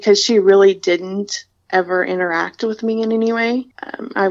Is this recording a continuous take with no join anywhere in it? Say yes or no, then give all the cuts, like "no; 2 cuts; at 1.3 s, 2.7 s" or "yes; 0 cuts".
yes; 0 cuts